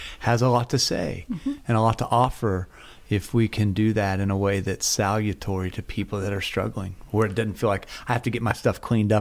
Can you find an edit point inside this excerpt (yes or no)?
no